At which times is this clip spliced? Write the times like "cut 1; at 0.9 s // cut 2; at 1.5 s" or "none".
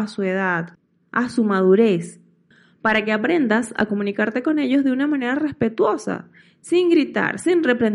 none